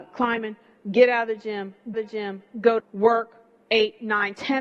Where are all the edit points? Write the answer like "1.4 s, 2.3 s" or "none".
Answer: 1.9 s, 2.8 s